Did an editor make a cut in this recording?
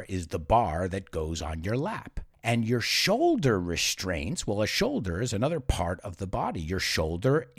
no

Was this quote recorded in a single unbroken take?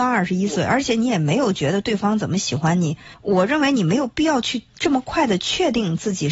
no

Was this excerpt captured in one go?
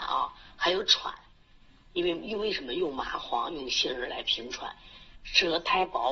yes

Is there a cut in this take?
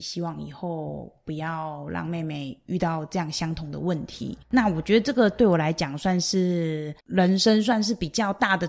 yes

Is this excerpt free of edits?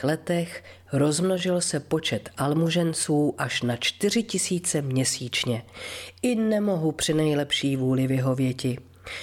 yes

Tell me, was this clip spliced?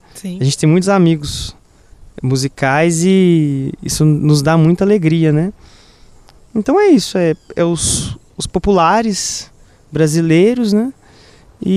no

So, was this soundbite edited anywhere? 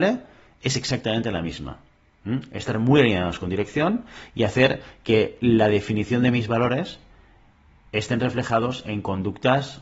no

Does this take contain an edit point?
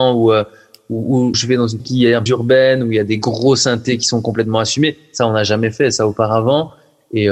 yes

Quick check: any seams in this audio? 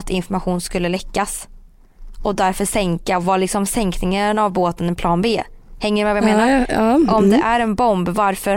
no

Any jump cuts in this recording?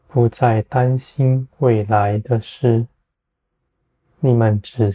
no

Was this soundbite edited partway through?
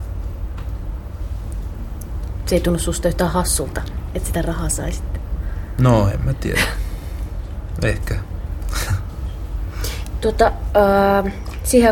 no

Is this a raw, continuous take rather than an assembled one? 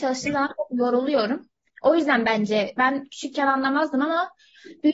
yes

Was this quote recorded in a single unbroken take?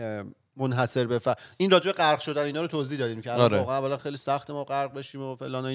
yes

